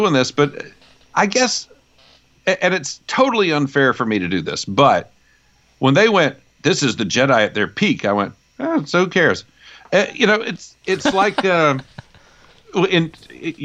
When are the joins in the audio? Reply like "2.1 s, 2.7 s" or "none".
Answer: none